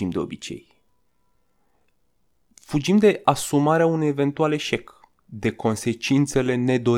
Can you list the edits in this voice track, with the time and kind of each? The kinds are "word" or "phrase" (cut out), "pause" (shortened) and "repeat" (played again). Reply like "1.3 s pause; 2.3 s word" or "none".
none

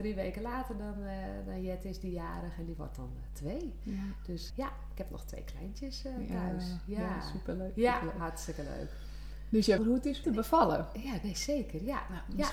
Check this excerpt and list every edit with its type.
4.5 s word; 9.8 s phrase; 10.2 s phrase

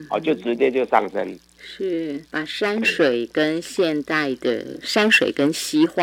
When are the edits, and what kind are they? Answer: 2.3 s pause

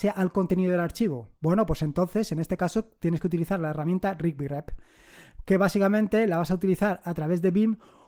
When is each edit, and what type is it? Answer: 1.4 s pause

